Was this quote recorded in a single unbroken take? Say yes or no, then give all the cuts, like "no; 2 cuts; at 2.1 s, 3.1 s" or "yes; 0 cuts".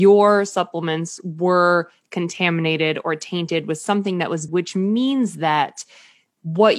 no; 1 cut; at 4.5 s